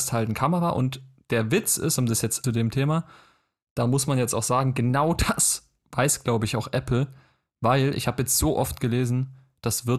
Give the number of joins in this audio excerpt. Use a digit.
1